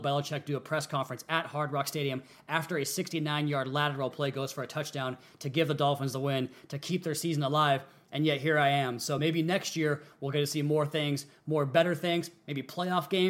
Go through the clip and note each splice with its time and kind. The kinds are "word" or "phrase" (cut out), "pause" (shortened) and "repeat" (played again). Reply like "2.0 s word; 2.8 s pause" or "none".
none

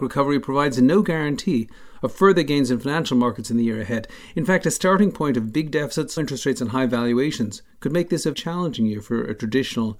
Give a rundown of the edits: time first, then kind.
6.2 s word; 7.7 s pause; 8.3 s word

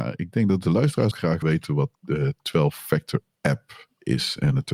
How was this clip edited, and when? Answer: 1.1 s word; 1.4 s word; 1.9 s pause

